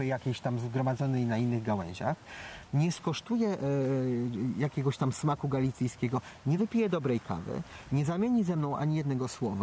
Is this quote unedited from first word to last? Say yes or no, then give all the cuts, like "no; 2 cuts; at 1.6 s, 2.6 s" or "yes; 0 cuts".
yes; 0 cuts